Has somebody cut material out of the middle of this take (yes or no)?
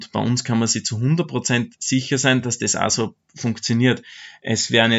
no